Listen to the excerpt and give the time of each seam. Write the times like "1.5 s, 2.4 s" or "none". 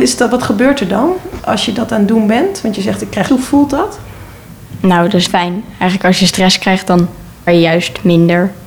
1.4 s, 3.3 s, 5.3 s, 7.5 s